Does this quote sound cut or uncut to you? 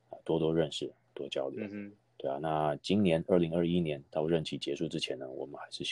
uncut